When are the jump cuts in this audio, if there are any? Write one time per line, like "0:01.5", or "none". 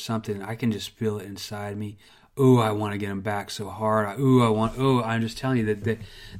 0:02.1